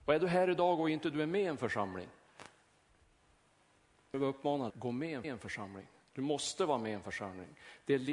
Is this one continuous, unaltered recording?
no; 3 cuts; at 4.1 s, 4.7 s, 5.2 s

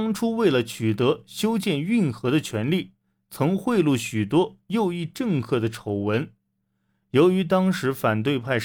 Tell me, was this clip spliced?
no; 0 cuts

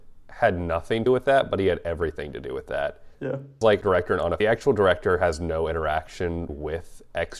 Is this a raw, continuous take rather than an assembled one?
no; 5 cuts; at 1.1 s, 3.1 s, 3.8 s, 4.4 s, 6.5 s

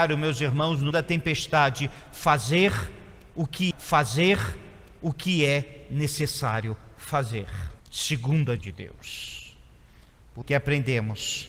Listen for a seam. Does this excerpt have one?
yes; 5 cuts; at 0.9 s, 3.7 s, 7.8 s, 8.6 s, 10.4 s

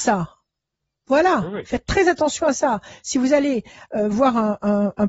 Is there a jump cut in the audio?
no; 0 cuts

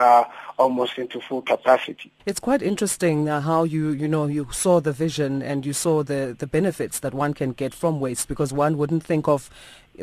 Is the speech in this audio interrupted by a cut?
yes; 1 cut; at 2.2 s

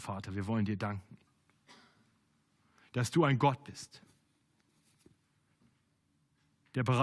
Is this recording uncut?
yes; 0 cuts

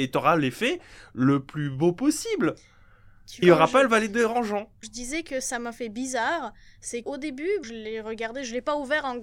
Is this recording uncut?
no; 4 cuts; at 3.4 s, 4.8 s, 7.0 s, 7.6 s

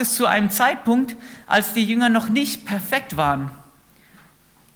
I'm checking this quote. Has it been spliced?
no; 0 cuts

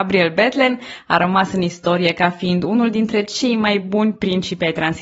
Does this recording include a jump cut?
no; 0 cuts

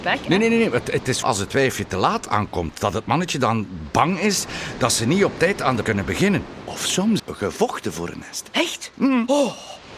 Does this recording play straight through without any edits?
no; 3 cuts; at 1.2 s, 5.8 s, 7.2 s

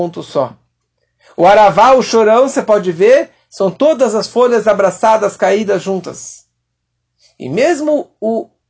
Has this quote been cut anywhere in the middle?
no; 0 cuts

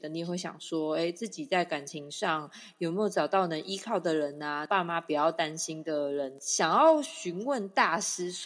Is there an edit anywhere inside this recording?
no; 0 cuts

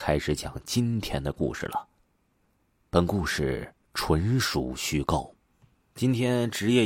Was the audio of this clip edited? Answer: yes; 2 cuts; at 3.8 s, 5.5 s

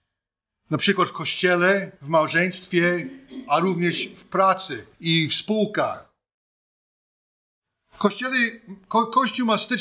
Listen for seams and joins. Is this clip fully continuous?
no; 2 cuts; at 2.0 s, 4.9 s

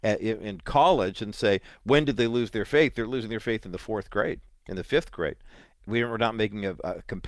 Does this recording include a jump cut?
yes; 1 cut; at 4.5 s

